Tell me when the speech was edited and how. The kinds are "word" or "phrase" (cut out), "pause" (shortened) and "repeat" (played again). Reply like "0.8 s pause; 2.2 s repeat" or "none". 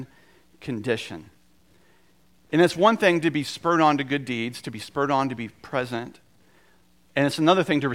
none